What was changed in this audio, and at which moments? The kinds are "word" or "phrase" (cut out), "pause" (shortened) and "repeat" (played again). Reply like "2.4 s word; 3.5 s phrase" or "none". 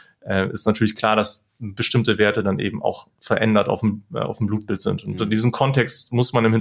none